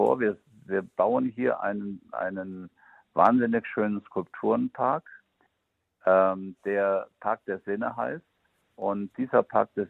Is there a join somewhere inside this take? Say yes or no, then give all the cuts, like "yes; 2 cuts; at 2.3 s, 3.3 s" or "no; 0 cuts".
no; 0 cuts